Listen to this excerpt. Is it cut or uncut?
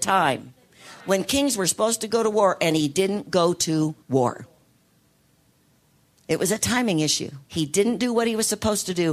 cut